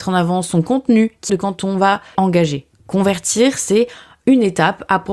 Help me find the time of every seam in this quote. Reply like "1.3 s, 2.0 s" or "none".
1.3 s, 2.1 s